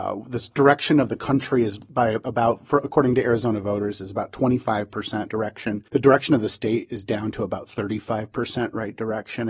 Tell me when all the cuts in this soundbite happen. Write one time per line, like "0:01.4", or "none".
0:05.3
0:05.9